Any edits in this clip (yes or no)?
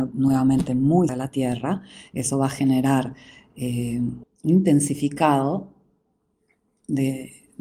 yes